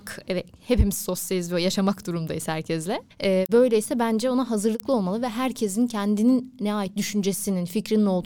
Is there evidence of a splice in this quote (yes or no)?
yes